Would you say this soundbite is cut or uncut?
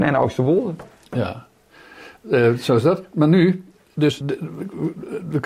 cut